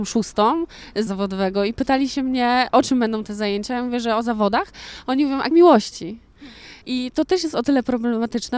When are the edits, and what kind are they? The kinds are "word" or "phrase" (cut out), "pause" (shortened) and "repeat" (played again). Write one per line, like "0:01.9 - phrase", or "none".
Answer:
0:01.1 - word
0:05.5 - phrase
0:06.8 - pause